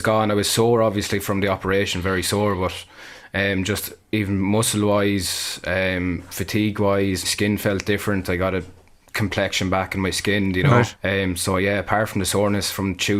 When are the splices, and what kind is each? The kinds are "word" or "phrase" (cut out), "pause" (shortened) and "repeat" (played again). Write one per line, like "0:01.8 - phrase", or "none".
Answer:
0:07.2 - word
0:11.0 - pause